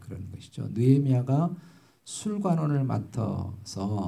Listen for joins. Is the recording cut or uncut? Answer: uncut